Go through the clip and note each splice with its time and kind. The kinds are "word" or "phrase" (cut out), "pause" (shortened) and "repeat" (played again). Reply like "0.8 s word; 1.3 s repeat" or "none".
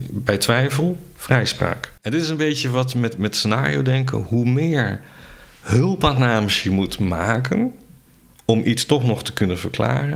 2.0 s pause